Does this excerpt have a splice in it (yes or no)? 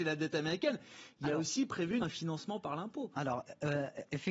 yes